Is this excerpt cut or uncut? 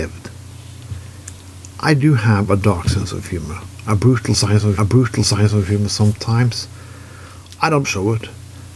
cut